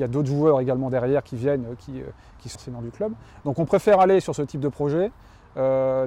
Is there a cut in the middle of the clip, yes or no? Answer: yes